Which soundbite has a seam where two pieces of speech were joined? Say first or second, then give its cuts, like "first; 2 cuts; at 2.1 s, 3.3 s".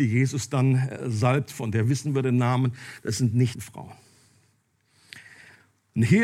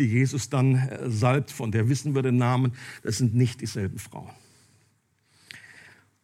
first; 1 cut; at 3.5 s